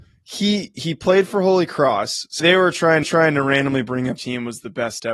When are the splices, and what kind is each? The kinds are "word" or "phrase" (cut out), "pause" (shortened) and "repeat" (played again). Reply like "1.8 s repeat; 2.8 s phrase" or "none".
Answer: 2.4 s word; 3.0 s repeat; 4.2 s word